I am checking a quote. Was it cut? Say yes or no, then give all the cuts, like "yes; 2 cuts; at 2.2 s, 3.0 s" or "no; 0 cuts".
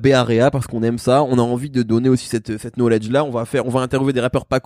no; 0 cuts